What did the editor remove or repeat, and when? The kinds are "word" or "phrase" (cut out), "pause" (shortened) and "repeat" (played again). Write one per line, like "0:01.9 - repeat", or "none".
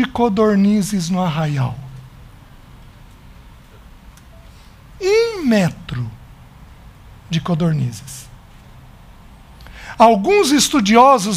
none